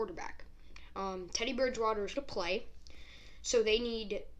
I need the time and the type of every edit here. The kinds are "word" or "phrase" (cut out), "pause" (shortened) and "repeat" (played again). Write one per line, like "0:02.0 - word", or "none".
0:02.2 - word